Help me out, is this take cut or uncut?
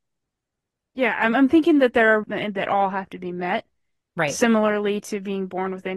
cut